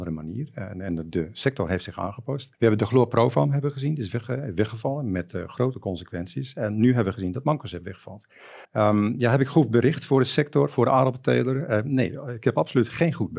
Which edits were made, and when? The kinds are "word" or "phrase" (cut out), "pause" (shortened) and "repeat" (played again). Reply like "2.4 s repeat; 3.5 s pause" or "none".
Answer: 2.5 s pause; 8.6 s pause